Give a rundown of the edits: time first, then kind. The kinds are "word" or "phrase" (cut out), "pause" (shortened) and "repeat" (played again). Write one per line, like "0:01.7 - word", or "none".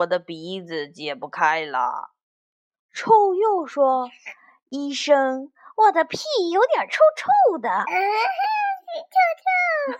none